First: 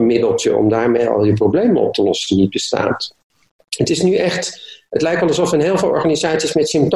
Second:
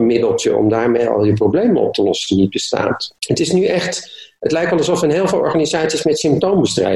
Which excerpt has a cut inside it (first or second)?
second